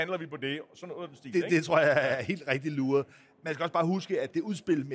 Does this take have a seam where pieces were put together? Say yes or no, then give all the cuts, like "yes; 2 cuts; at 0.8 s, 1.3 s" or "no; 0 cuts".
no; 0 cuts